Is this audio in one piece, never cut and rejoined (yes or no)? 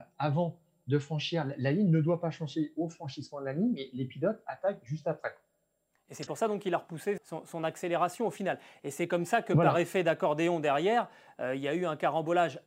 no